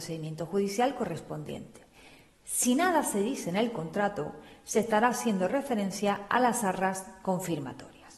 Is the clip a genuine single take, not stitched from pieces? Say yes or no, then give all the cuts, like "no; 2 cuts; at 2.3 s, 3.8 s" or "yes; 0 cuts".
yes; 0 cuts